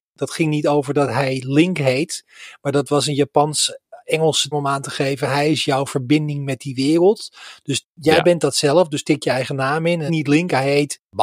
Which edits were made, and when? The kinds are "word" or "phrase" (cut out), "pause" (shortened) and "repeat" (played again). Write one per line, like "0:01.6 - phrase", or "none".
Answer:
0:04.5 - word
0:10.1 - word